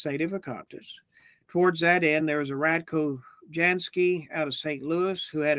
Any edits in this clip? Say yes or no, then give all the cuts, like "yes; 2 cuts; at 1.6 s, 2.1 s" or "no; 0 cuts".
no; 0 cuts